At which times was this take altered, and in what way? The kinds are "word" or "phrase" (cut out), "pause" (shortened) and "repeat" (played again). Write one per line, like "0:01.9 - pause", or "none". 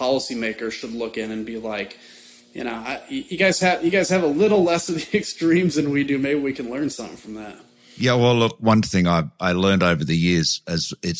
none